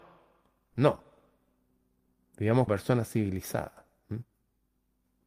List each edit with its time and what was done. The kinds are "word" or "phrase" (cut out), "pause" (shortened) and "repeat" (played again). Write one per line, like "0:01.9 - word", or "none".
0:02.7 - word